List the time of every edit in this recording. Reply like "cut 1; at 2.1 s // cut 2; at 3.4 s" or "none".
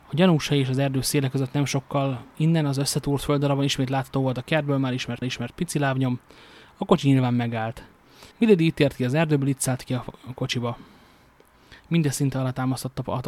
cut 1; at 2.3 s // cut 2; at 5.2 s // cut 3; at 8.3 s // cut 4; at 11.8 s